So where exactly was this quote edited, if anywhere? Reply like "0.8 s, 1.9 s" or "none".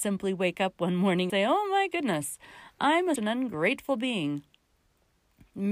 1.3 s, 3.2 s